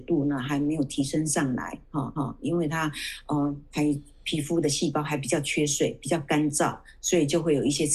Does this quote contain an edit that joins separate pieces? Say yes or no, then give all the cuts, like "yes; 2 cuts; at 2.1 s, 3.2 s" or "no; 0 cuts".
yes; 1 cut; at 2.2 s